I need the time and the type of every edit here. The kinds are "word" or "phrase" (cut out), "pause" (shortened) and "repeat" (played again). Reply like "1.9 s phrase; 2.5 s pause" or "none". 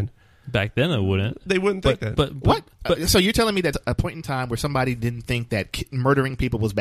3.7 s word